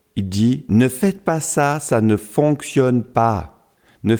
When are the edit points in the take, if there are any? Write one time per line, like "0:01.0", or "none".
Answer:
none